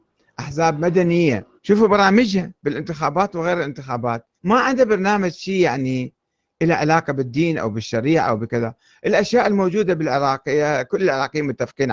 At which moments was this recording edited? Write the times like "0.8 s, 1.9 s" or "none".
1.6 s, 2.6 s, 4.4 s

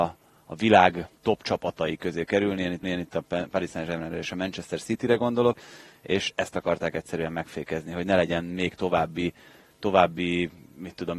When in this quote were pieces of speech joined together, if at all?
1.2 s, 2.8 s

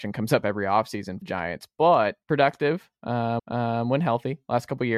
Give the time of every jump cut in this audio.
1.2 s, 2.2 s, 3.4 s

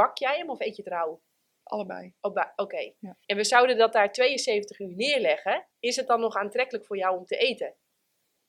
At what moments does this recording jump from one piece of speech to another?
2.2 s, 3.2 s, 5.7 s

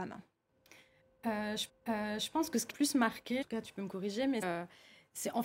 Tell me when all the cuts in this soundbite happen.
1.7 s, 2.7 s, 3.4 s, 4.4 s

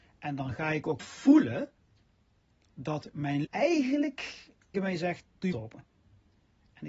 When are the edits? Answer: 1.0 s, 3.4 s, 4.7 s, 5.5 s

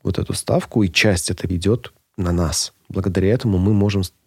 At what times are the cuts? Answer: 1.5 s

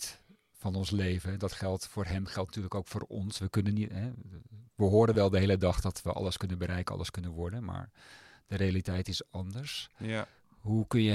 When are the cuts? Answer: none

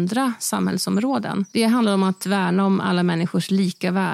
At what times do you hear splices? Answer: 1.5 s

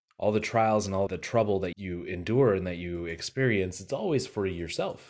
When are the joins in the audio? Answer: 1.1 s, 1.7 s

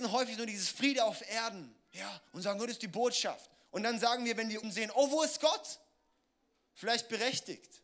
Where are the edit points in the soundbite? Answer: 2.3 s, 3.6 s, 4.6 s

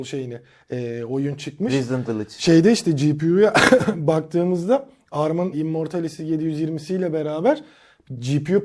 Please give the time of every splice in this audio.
2.1 s, 5.5 s

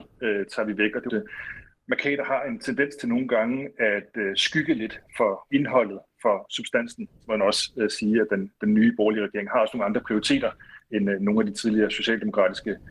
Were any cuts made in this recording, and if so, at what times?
1.1 s, 5.5 s

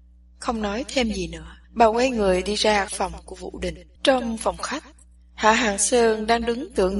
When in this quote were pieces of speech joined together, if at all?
1.6 s, 2.9 s, 4.0 s

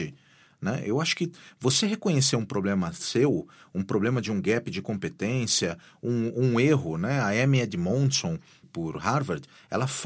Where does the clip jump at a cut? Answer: 8.6 s

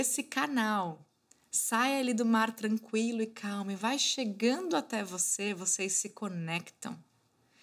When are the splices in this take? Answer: none

